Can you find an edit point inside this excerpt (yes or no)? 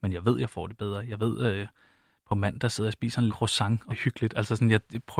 yes